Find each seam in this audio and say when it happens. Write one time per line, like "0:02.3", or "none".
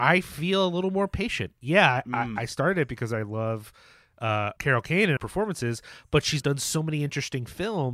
0:04.6
0:05.2
0:06.4